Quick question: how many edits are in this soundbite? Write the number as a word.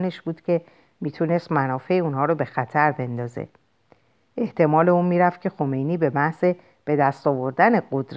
zero